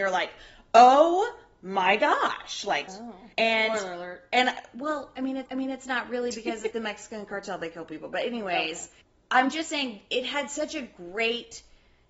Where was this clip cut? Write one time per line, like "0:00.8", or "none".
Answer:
0:02.9
0:03.3
0:05.5
0:06.7
0:09.0